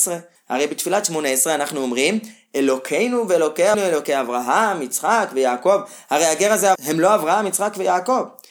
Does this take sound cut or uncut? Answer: cut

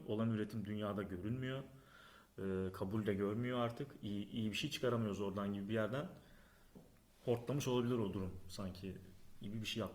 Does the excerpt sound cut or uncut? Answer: uncut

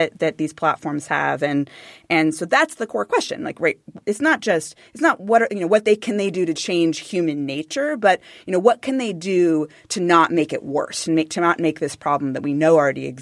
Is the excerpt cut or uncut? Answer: uncut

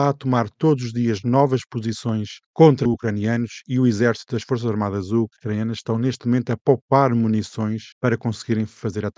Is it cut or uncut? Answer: uncut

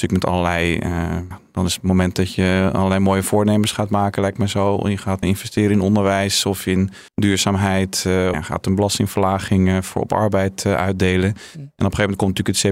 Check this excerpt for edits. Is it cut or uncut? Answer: cut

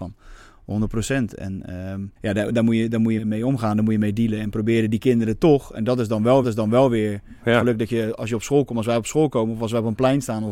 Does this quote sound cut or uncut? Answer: cut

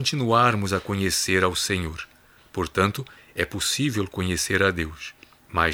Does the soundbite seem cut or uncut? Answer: uncut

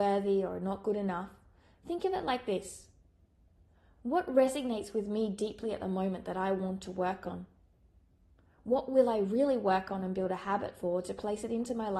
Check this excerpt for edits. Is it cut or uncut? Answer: uncut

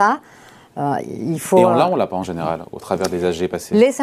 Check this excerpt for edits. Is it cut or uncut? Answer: uncut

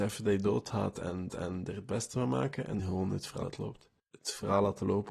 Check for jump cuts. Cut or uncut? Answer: cut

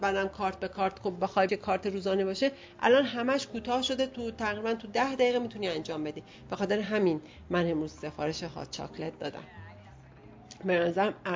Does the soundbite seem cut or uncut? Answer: cut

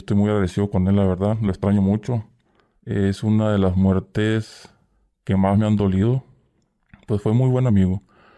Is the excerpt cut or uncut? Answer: uncut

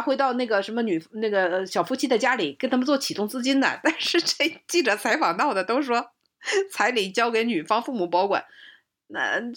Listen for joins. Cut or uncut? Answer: uncut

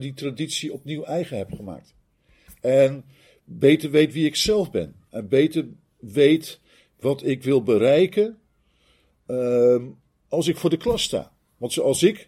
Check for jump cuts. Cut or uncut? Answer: uncut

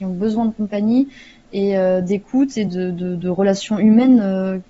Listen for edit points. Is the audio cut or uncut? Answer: uncut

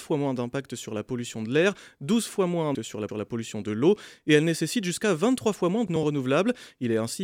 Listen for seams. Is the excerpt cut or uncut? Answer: cut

